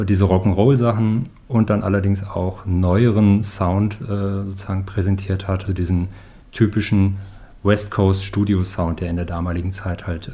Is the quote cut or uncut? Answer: cut